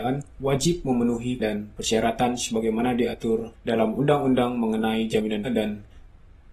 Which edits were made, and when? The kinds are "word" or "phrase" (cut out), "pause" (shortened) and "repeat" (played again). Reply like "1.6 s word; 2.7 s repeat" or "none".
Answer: 1.4 s word; 3.5 s pause; 5.4 s word

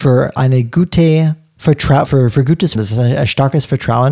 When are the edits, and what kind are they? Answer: 2.1 s word; 2.8 s word

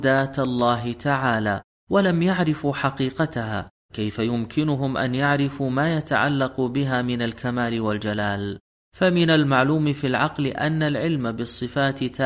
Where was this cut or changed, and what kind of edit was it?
none

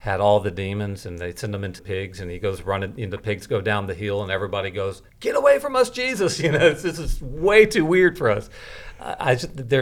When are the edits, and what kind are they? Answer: 1.8 s word; 5.1 s pause

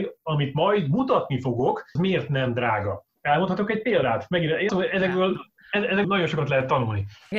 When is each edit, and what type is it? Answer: 2.0 s word; 4.7 s word; 6.0 s word

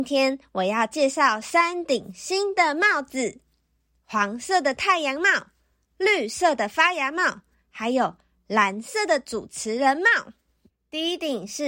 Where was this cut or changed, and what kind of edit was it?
none

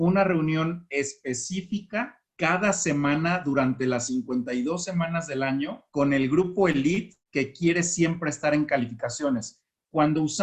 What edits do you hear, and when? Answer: 2.3 s pause; 5.9 s pause; 7.3 s pause

